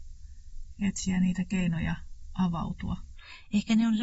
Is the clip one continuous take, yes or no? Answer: yes